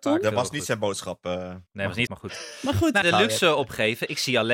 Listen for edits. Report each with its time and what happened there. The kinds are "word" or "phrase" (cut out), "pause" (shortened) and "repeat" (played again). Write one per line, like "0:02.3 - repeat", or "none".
0:01.7 - pause
0:02.1 - phrase
0:03.0 - word